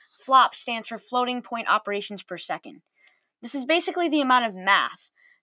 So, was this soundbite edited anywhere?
no; 0 cuts

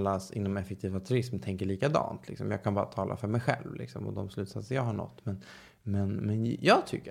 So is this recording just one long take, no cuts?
yes; 0 cuts

